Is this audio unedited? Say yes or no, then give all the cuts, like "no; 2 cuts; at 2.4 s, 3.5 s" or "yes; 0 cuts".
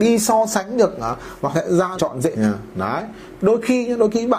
no; 4 cuts; at 1.5 s, 1.9 s, 2.3 s, 3.4 s